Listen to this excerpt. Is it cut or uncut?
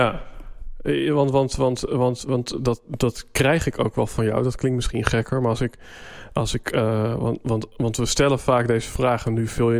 uncut